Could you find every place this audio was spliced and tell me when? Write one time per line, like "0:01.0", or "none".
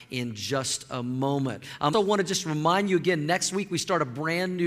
0:01.9